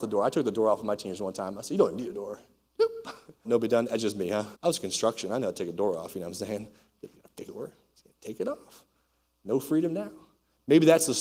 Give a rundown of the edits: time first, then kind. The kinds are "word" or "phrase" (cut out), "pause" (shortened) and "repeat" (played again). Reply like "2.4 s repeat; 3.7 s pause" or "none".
3.4 s word; 4.5 s pause; 7.1 s word; 7.5 s word